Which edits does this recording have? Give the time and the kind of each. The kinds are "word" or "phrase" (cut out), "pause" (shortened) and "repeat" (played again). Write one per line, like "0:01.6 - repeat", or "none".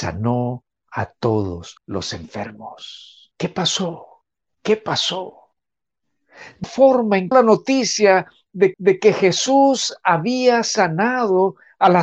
0:01.8 - pause
0:03.3 - pause
0:04.4 - pause
0:06.6 - word
0:07.3 - phrase
0:08.7 - repeat